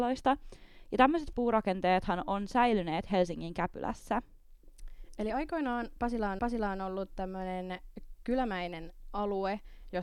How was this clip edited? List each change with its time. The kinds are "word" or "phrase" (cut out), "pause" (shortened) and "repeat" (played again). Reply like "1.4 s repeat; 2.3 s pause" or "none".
1.3 s word; 6.4 s repeat